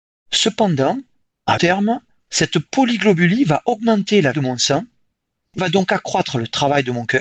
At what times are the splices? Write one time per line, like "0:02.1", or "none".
0:01.6
0:04.3
0:05.6